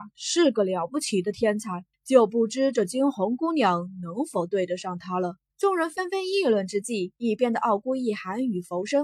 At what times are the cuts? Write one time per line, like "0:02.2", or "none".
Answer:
0:01.9
0:05.5
0:07.2